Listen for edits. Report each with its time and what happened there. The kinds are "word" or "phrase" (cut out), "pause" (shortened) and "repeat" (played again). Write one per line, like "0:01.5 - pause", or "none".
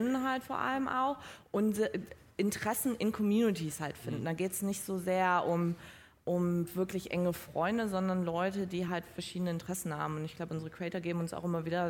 none